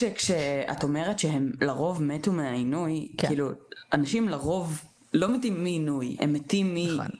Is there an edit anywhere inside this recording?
no; 0 cuts

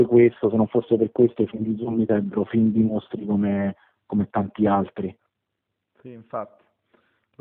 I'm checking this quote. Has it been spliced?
no; 0 cuts

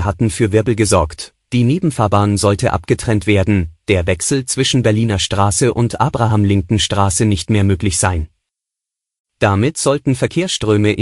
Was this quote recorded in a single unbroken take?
yes; 0 cuts

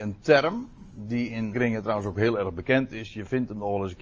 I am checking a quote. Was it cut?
yes; 1 cut; at 1.5 s

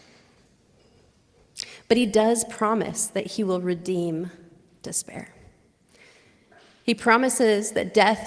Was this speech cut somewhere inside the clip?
no; 0 cuts

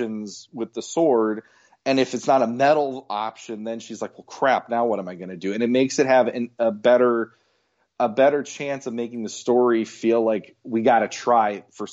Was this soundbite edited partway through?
no; 0 cuts

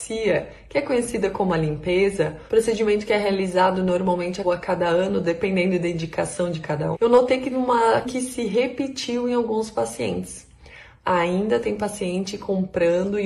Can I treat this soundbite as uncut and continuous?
no; 5 cuts; at 2.5 s, 4.4 s, 6.9 s, 7.5 s, 8.0 s

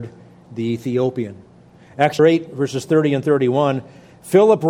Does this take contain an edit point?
yes; 1 cut; at 2.2 s

